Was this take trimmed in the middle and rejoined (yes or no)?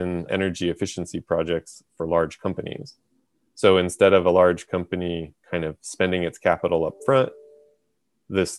no